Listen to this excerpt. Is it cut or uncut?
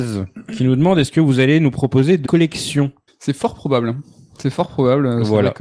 cut